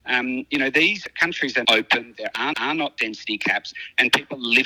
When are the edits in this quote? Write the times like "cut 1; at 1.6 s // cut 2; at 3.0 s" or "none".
cut 1; at 1.6 s // cut 2; at 2.5 s